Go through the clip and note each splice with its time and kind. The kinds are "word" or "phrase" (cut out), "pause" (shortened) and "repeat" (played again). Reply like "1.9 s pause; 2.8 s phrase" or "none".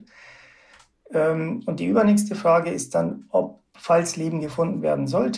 none